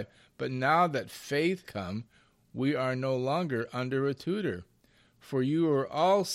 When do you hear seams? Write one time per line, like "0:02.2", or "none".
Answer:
0:01.6

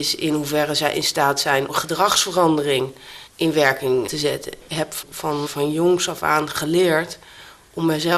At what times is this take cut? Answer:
0:01.7
0:03.3
0:04.1
0:05.5

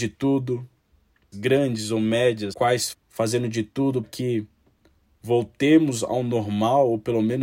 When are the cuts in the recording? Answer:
0:01.3
0:02.5
0:02.9
0:04.0

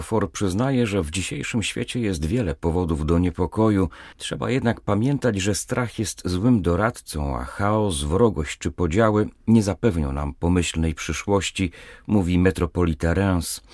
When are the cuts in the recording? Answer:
0:04.1

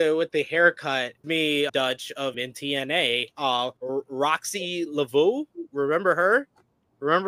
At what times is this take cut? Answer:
0:01.2
0:01.7
0:02.3
0:03.8

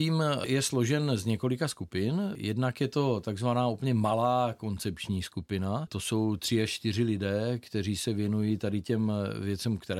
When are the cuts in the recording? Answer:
none

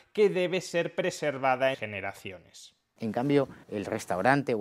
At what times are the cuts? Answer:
0:01.7
0:03.6

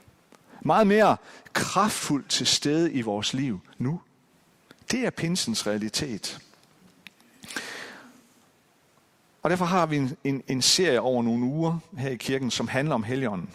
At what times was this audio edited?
0:10.4

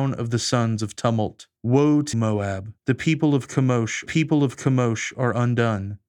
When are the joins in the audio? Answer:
0:01.6
0:02.1
0:02.8
0:04.1

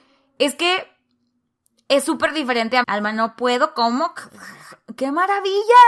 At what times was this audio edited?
0:02.8

